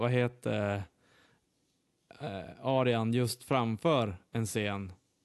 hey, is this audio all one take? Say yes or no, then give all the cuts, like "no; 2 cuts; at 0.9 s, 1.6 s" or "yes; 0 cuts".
yes; 0 cuts